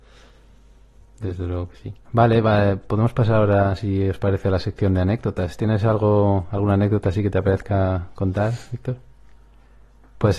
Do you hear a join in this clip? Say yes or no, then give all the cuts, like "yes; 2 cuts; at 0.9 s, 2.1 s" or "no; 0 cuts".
yes; 1 cut; at 2.0 s